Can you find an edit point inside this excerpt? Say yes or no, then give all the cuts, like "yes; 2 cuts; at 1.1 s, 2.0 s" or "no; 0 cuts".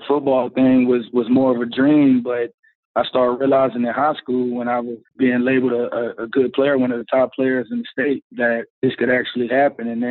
yes; 1 cut; at 8.7 s